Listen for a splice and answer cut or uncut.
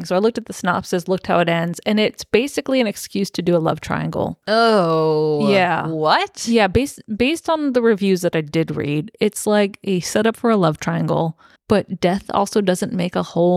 cut